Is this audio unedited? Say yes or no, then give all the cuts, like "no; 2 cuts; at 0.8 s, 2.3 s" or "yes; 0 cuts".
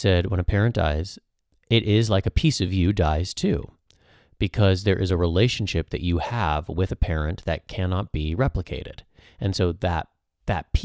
yes; 0 cuts